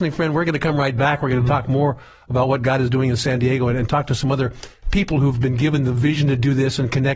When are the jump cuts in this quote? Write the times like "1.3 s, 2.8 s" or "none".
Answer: none